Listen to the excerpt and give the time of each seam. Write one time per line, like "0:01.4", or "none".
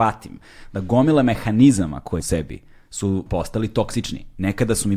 0:02.2
0:03.3